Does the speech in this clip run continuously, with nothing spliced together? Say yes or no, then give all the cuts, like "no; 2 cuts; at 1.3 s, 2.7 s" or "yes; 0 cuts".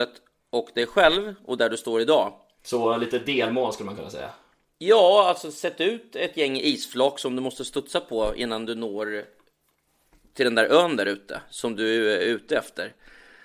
yes; 0 cuts